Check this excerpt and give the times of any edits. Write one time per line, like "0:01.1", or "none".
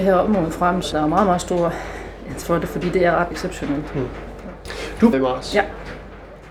0:00.9
0:02.4
0:03.3
0:05.1